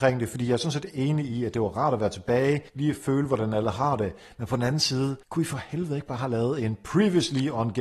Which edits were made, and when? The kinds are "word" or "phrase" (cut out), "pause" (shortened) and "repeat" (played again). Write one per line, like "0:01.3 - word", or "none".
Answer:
0:02.7 - pause
0:05.2 - pause